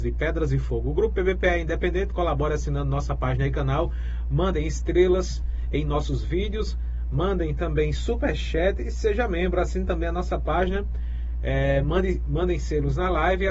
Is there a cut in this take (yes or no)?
no